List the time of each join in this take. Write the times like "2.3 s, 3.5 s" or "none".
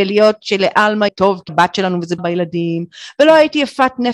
1.1 s, 1.5 s, 2.2 s